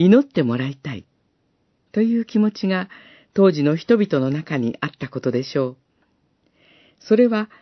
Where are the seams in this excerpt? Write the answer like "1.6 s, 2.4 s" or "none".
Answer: none